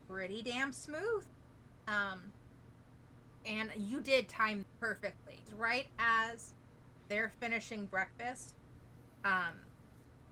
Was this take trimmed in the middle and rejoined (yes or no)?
yes